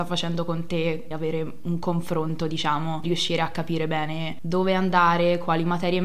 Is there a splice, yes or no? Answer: yes